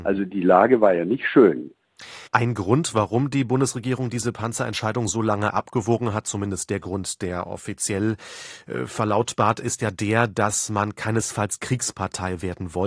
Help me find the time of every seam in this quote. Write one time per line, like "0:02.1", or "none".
0:02.3